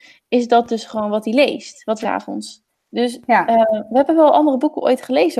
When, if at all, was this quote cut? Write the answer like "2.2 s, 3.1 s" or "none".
2.0 s, 2.7 s

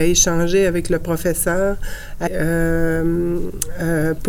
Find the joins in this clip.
2.3 s

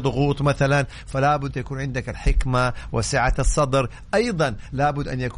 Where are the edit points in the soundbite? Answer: 1.5 s

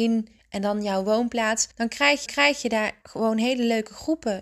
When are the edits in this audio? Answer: 1.7 s, 2.3 s, 3.0 s

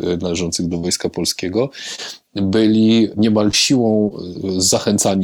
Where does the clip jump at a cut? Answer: none

